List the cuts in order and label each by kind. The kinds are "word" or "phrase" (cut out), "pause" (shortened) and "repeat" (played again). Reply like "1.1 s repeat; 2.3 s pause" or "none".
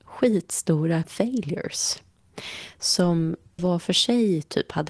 1.0 s word; 3.6 s word